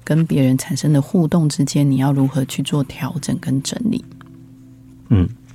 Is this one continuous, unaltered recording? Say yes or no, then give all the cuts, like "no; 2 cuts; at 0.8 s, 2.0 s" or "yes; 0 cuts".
yes; 0 cuts